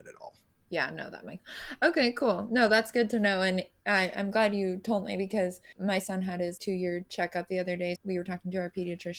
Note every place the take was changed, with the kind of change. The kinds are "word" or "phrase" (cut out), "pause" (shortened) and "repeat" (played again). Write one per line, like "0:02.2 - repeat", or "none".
0:01.4 - word
0:06.6 - word
0:08.0 - word